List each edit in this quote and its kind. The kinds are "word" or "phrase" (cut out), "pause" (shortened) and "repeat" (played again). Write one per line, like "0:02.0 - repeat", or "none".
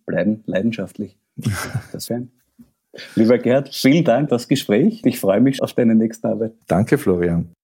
0:02.1 - phrase
0:04.3 - word
0:05.0 - word
0:05.6 - word
0:06.6 - pause